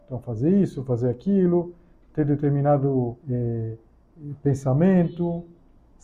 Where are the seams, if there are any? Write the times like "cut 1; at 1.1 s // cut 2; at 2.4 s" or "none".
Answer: cut 1; at 3.2 s